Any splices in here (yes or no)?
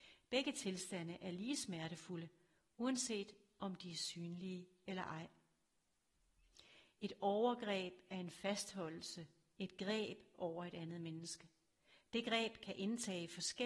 no